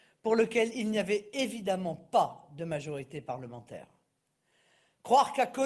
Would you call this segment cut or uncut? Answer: uncut